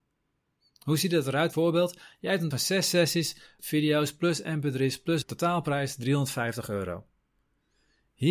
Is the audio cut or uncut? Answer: cut